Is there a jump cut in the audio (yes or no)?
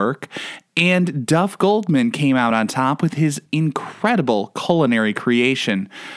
no